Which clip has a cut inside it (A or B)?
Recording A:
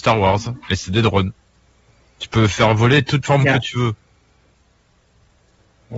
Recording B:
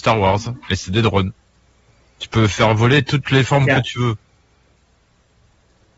A